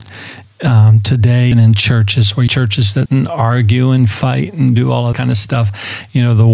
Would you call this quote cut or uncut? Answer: cut